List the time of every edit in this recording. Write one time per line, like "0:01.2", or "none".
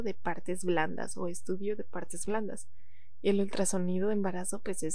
none